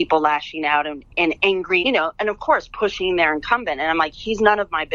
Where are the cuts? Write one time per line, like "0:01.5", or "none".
0:01.8